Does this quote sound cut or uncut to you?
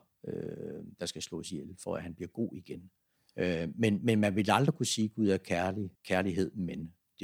cut